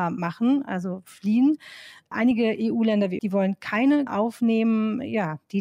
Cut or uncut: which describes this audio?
cut